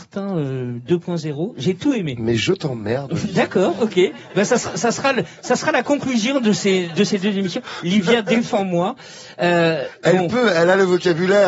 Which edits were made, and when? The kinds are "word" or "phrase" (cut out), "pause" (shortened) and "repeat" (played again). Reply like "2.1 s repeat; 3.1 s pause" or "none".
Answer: none